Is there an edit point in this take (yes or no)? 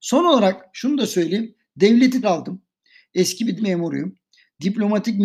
yes